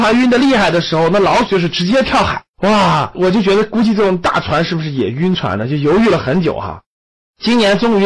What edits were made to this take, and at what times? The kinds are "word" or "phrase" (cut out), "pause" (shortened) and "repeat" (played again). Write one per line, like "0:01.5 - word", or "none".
0:02.5 - pause